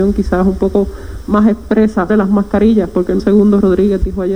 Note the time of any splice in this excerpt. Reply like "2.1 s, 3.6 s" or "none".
2.1 s, 3.2 s